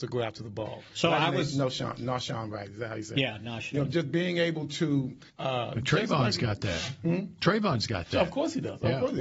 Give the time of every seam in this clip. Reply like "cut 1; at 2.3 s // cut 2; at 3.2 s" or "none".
cut 1; at 5.3 s